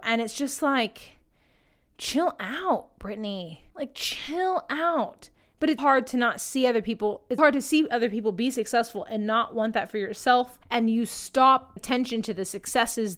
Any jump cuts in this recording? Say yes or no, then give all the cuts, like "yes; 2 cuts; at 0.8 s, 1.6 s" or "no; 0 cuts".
yes; 6 cuts; at 3.7 s, 5.4 s, 5.8 s, 7.4 s, 10.6 s, 11.8 s